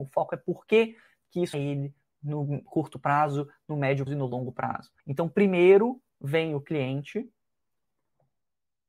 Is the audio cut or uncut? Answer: cut